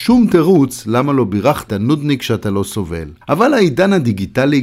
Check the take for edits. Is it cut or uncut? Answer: cut